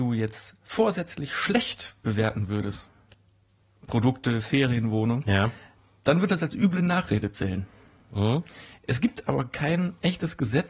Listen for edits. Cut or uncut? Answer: uncut